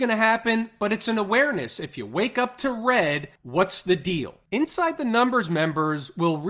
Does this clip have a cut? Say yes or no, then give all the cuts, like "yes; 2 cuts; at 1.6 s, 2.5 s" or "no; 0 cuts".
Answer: no; 0 cuts